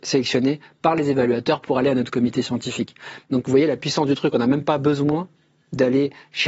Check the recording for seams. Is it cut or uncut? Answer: uncut